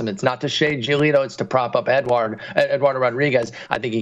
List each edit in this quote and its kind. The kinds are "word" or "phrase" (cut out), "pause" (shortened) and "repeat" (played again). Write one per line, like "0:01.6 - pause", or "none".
none